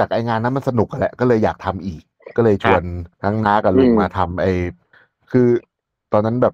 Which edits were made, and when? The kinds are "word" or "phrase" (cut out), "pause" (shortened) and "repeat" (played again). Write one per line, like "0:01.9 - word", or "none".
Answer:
0:03.1 - pause
0:04.9 - pause

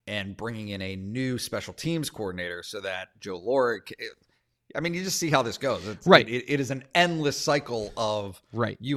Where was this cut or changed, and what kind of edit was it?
none

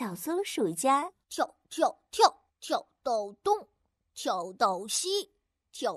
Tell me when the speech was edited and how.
0:01.2 - pause
0:02.5 - pause

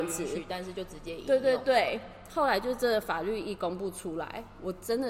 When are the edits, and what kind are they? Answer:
none

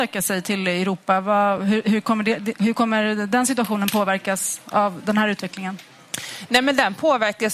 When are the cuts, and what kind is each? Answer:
none

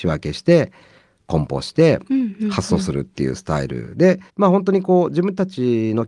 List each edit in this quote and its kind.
0:04.3 - pause

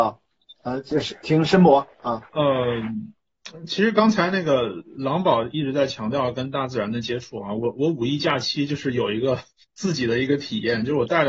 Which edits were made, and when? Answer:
0:02.3 - pause
0:09.6 - pause

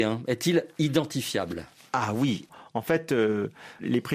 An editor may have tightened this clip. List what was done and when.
none

